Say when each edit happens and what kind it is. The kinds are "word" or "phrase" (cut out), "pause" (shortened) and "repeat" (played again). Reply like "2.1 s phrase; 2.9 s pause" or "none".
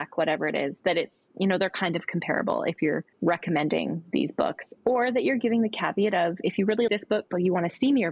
3.1 s pause; 6.9 s word